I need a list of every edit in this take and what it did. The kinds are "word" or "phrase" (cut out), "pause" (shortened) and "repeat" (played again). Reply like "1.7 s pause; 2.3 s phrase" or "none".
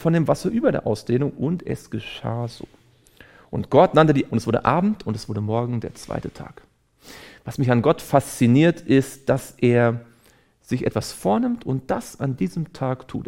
4.3 s phrase

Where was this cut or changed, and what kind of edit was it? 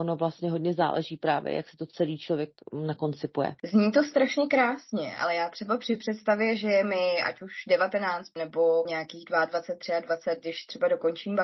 3.6 s pause; 8.4 s word; 8.8 s word

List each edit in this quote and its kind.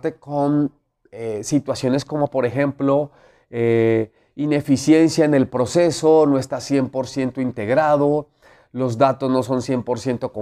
none

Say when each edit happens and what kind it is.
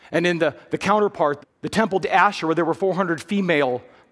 1.4 s word; 2.0 s word

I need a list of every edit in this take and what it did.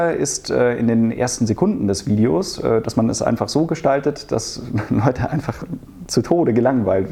none

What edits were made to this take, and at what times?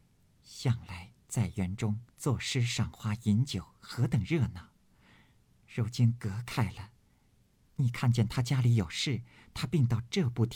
2.1 s pause

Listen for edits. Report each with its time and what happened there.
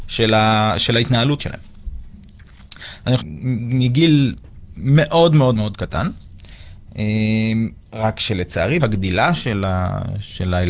1.4 s word; 3.2 s phrase; 5.5 s word; 7.8 s pause; 8.8 s phrase

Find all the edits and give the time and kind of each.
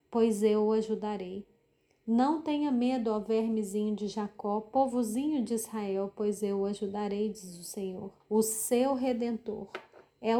8.2 s pause

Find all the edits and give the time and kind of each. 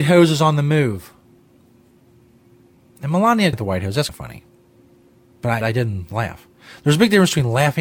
3.5 s word; 4.1 s word; 5.6 s word

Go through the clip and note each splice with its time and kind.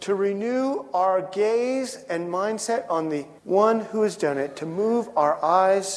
3.4 s pause

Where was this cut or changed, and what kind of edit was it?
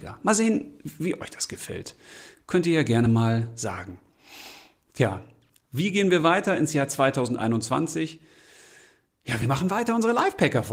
none

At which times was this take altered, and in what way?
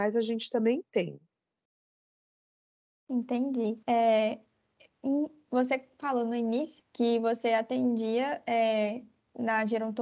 3.8 s pause; 6.8 s word

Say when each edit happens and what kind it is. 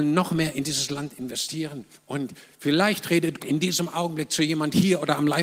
1.9 s pause; 3.4 s word

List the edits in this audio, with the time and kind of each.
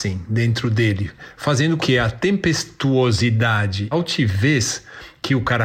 1.8 s word; 3.9 s word

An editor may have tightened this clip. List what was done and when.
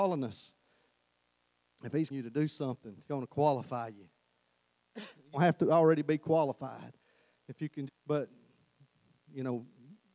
2.1 s word; 3.1 s word; 5.3 s word; 7.9 s word

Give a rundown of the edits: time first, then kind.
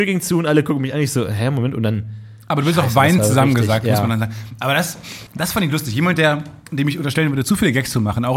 5.3 s pause

